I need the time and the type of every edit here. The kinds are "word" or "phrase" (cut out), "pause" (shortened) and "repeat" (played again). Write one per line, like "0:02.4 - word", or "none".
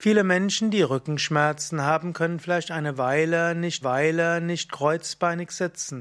0:03.8 - repeat